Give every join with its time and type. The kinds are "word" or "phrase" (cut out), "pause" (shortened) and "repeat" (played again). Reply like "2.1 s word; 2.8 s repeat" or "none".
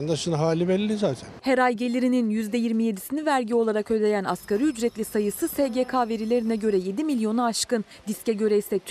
none